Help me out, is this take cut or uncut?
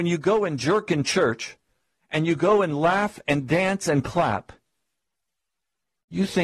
uncut